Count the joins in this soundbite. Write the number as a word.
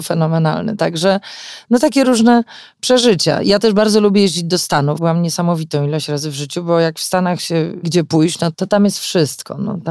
three